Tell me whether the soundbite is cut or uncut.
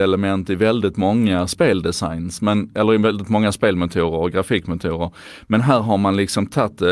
uncut